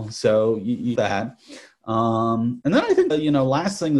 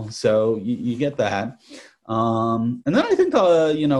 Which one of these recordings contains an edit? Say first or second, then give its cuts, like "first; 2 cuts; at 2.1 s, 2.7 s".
first; 2 cuts; at 1.0 s, 3.1 s